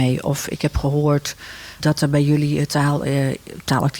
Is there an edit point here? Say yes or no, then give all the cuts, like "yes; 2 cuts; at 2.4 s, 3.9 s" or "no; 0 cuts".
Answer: yes; 1 cut; at 1.8 s